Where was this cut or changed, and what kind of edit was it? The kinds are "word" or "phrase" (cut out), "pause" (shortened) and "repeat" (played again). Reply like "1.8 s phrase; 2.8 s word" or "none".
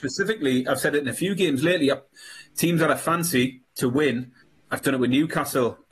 3.7 s pause; 4.4 s pause